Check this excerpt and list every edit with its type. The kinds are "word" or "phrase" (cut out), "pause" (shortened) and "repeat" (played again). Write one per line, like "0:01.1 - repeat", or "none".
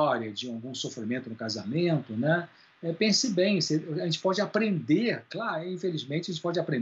none